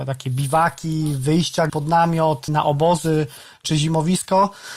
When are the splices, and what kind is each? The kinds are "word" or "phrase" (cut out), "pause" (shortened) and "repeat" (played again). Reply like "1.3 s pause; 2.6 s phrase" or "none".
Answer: 1.7 s word; 2.5 s word